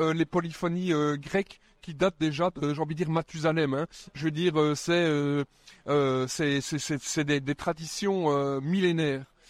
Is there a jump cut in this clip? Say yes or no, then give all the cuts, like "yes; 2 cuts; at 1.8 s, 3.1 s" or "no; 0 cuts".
no; 0 cuts